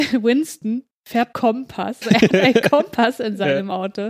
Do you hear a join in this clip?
yes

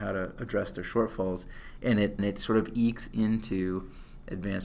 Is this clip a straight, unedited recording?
no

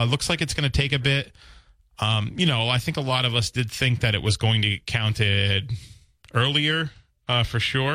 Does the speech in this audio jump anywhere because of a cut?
no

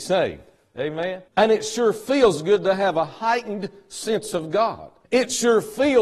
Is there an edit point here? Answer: yes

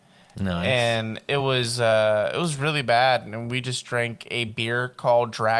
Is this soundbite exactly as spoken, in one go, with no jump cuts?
yes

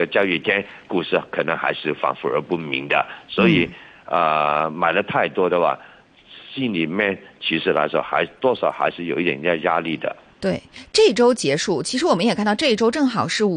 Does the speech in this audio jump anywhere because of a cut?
no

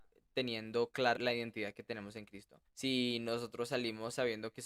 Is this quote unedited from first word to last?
no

